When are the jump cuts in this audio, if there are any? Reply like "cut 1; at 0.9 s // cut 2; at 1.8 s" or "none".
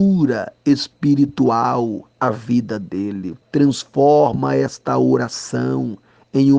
cut 1; at 3.4 s